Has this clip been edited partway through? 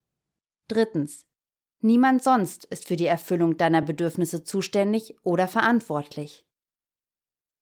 no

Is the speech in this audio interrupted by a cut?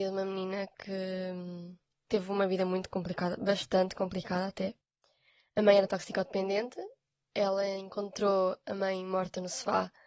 no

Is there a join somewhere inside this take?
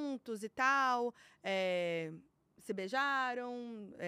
no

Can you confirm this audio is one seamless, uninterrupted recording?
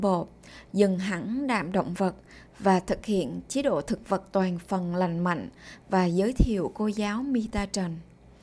yes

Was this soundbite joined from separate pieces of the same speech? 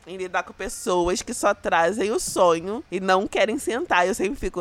no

